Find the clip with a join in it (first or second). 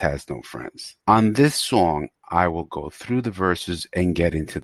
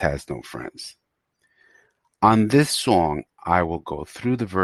first